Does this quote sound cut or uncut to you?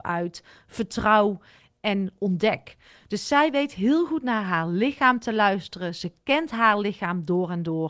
uncut